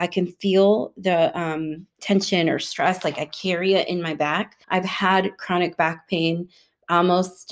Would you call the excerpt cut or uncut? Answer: cut